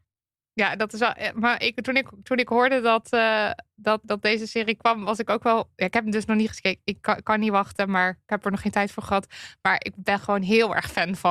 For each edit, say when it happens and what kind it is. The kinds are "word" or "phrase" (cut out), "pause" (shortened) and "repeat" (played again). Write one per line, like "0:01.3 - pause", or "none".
0:04.0 - word